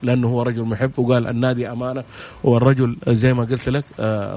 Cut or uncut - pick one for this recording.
uncut